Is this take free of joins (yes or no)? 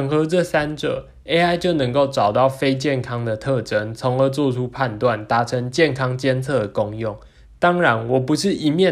yes